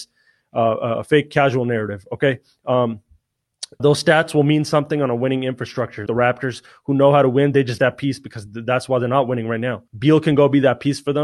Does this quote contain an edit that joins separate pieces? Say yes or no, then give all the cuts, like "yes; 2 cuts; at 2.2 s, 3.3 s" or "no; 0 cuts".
yes; 4 cuts; at 3.8 s, 6.1 s, 7.8 s, 9.9 s